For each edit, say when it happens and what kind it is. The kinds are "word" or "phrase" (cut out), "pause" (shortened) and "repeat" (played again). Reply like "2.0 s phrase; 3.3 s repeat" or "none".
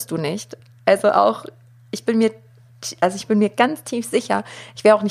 none